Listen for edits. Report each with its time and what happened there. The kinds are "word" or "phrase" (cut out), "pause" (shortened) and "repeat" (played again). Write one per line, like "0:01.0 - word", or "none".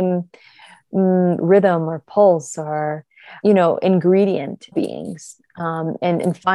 0:03.4 - word
0:04.7 - phrase